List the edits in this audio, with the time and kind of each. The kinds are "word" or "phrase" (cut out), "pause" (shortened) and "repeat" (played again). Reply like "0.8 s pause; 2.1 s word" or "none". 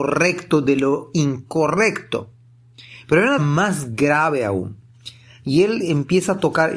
3.4 s word